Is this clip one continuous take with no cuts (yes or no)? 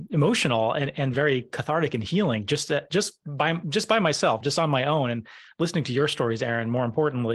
yes